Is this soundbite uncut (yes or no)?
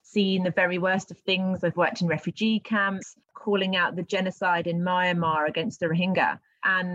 no